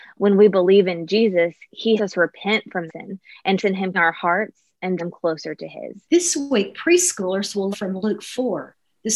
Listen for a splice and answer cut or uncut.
cut